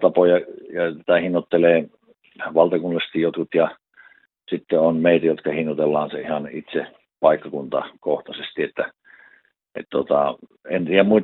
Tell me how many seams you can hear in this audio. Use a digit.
0